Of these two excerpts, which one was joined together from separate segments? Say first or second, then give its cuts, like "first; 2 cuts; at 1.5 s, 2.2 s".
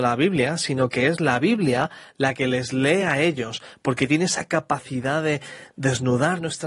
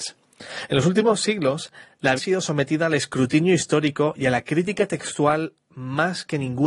second; 1 cut; at 2.2 s